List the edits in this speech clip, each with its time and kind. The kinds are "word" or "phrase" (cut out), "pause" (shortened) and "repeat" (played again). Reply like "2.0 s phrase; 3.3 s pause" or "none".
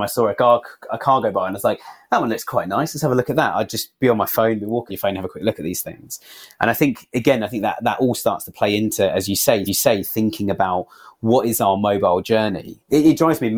4.9 s phrase; 9.7 s repeat